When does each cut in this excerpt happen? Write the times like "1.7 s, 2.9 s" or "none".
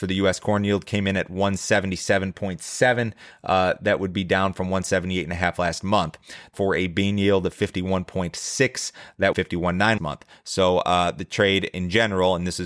6.5 s, 9.3 s, 10.0 s